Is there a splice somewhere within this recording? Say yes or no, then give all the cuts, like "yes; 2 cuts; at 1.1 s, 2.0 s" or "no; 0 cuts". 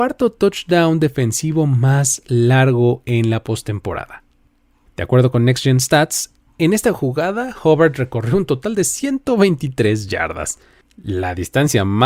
no; 0 cuts